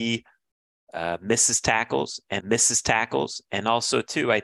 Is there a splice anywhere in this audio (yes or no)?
yes